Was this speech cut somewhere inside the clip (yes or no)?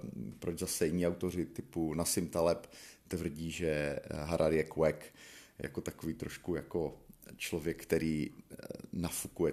no